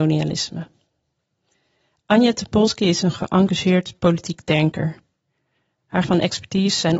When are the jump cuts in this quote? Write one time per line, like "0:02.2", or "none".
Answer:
0:06.0